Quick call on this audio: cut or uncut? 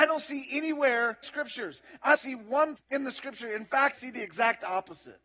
cut